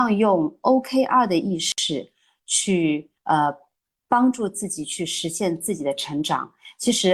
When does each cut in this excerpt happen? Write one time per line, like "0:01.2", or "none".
0:03.2